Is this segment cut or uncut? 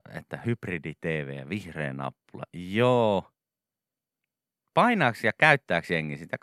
uncut